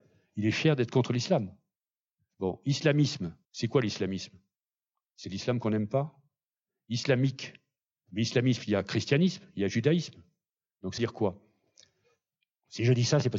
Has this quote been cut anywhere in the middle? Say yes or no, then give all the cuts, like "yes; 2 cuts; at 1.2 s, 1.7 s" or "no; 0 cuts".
yes; 2 cuts; at 3.4 s, 11.0 s